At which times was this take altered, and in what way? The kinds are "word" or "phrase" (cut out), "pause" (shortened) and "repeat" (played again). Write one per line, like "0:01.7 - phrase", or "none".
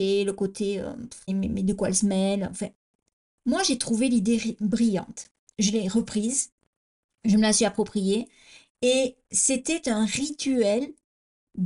0:01.3 - word